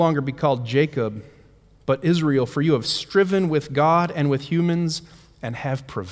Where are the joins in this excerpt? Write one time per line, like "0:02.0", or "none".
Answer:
none